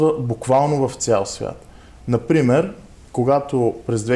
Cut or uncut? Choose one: uncut